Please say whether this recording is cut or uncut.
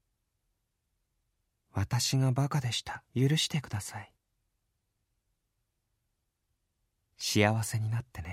cut